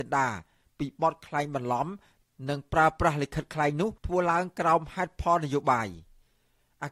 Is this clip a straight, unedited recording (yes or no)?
no